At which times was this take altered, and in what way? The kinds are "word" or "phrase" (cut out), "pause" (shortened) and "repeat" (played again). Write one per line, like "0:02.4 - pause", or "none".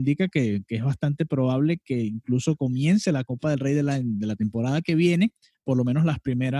0:05.5 - pause